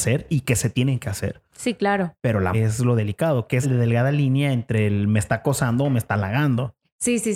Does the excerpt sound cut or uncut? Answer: cut